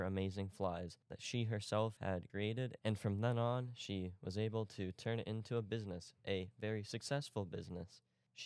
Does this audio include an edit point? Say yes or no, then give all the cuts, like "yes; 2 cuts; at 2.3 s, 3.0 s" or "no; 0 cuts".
no; 0 cuts